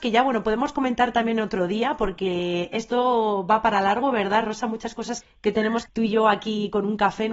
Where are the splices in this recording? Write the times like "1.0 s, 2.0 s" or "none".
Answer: 5.2 s, 5.9 s